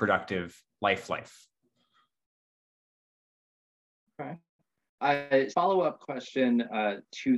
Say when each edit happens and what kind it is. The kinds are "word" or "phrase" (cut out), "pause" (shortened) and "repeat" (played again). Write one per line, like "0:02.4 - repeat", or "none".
0:05.5 - word